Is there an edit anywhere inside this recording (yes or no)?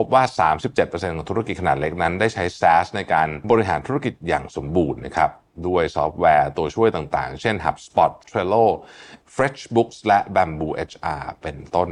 yes